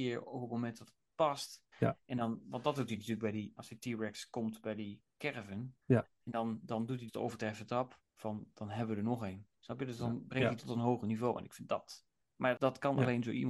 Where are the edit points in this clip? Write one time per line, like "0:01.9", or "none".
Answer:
0:01.7
0:03.6
0:05.8
0:07.1
0:08.1
0:10.6
0:12.6